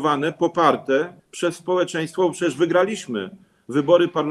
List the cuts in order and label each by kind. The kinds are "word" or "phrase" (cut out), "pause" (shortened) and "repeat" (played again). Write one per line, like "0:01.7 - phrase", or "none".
0:01.2 - pause

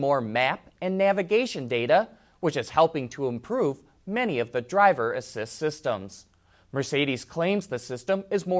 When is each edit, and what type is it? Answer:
none

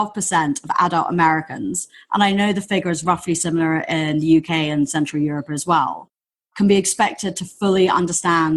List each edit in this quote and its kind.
none

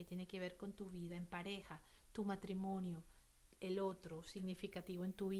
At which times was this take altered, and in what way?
none

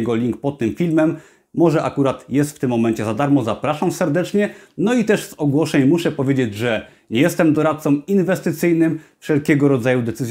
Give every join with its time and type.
none

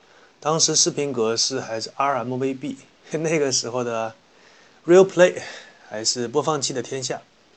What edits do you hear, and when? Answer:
none

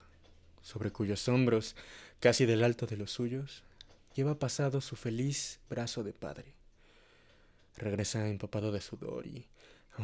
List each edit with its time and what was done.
none

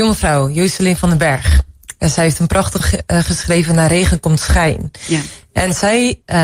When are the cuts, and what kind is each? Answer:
0:02.8 - word

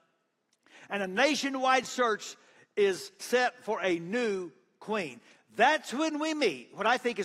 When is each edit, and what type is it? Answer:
none

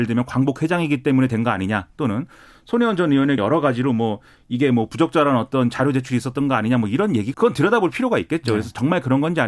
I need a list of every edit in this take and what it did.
0:03.4 - word
0:07.3 - word

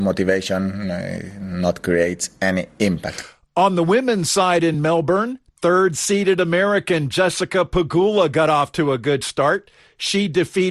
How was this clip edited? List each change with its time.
none

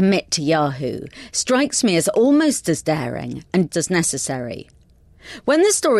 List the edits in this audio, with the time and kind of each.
0:03.7 - word

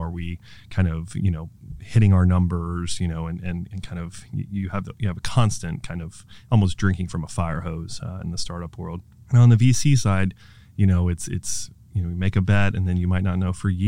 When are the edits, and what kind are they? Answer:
none

